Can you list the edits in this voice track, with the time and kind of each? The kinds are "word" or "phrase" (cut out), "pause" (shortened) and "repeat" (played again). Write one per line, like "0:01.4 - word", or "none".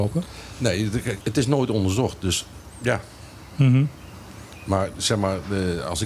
0:01.2 - word